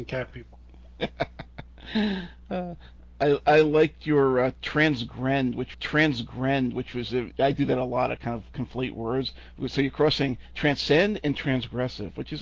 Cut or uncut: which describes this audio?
cut